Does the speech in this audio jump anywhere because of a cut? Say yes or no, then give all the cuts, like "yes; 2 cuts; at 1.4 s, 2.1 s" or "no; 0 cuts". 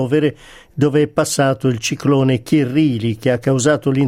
no; 0 cuts